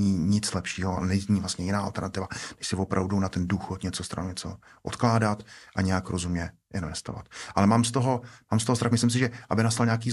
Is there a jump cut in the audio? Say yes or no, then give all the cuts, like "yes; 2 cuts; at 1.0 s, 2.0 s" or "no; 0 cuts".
no; 0 cuts